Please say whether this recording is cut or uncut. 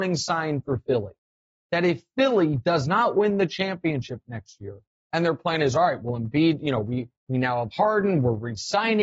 uncut